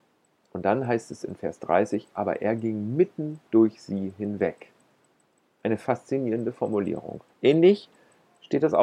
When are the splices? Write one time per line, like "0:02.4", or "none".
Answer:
0:07.3